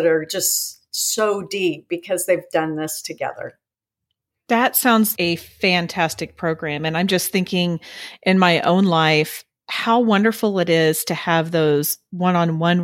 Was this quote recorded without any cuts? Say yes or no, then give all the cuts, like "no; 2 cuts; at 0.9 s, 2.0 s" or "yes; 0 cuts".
no; 1 cut; at 5.1 s